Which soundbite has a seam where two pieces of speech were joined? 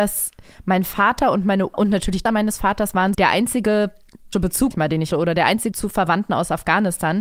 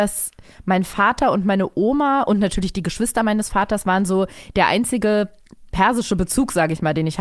first; 7 cuts; at 1.7 s, 2.3 s, 3.1 s, 4.3 s, 4.7 s, 5.1 s, 5.7 s

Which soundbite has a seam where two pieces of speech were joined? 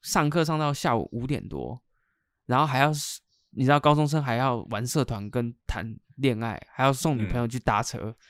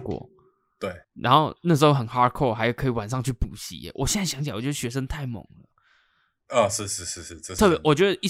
second; 1 cut; at 1.0 s

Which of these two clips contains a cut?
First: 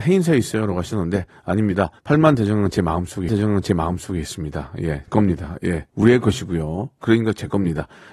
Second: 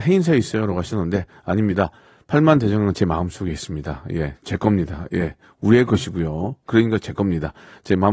first; 4 cuts; at 2.0 s, 3.3 s, 5.1 s, 5.9 s

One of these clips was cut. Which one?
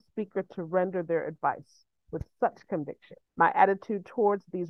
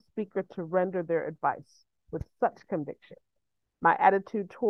first; 1 cut; at 3.3 s

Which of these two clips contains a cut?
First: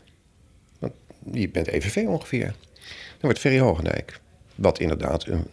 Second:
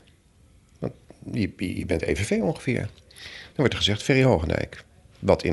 first; 2 cuts; at 1.5 s, 3.3 s

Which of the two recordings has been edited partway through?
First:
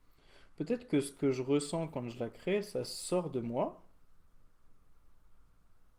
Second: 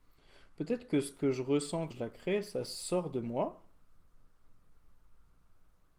second; 1 cut; at 1.9 s

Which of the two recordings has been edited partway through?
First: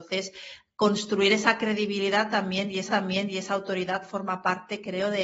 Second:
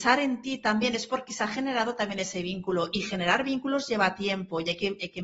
first; 1 cut; at 2.9 s

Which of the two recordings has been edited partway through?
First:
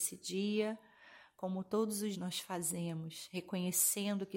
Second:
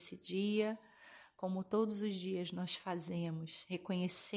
first; 1 cut; at 2.1 s

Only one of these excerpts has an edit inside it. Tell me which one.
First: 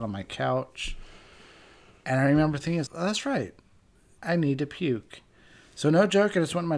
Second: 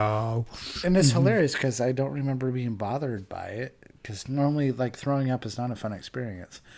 first; 1 cut; at 2.9 s

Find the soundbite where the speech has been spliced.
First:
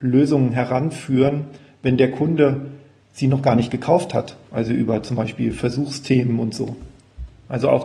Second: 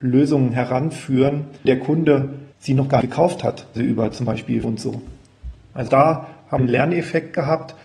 second; 7 cuts; at 1.6 s, 2.5 s, 3.0 s, 3.8 s, 4.6 s, 5.9 s, 6.6 s

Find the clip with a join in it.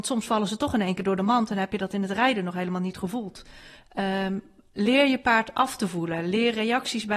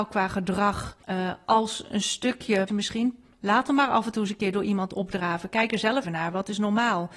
second; 3 cuts; at 1.0 s, 2.7 s, 6.0 s

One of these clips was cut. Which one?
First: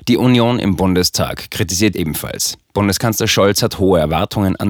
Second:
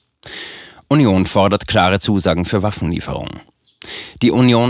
first; 1 cut; at 1.9 s

